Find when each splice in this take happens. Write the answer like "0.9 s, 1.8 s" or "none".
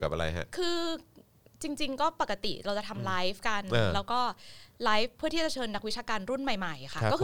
none